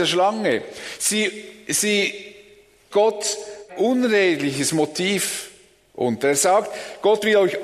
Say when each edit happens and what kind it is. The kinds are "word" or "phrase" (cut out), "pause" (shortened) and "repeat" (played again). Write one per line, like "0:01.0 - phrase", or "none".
0:02.9 - word
0:03.7 - word